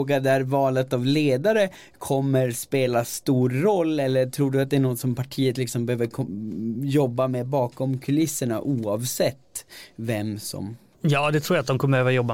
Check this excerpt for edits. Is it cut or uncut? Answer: uncut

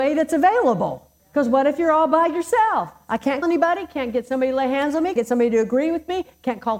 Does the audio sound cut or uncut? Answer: cut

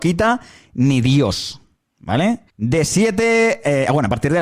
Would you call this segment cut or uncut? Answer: cut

